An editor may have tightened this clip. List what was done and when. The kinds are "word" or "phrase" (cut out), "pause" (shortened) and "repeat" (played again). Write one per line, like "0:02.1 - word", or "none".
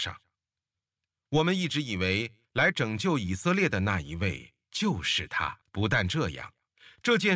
0:05.6 - pause